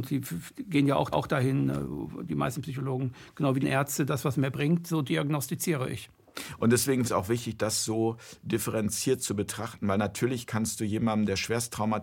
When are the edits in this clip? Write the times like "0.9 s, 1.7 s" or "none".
1.1 s, 3.6 s, 7.0 s